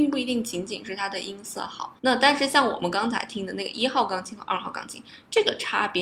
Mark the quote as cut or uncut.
cut